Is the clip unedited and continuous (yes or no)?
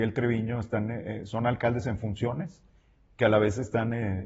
yes